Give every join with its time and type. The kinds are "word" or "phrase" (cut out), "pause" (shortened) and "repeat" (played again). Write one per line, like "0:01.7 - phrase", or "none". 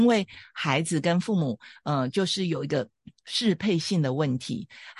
none